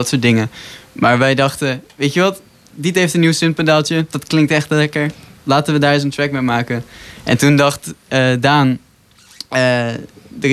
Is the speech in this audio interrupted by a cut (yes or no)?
no